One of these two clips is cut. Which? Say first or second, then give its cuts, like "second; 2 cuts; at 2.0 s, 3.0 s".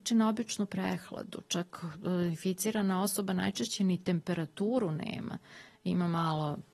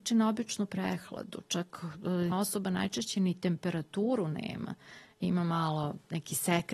second; 1 cut; at 2.3 s